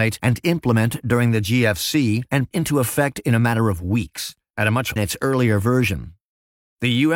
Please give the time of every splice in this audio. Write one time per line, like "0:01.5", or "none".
0:02.5
0:05.0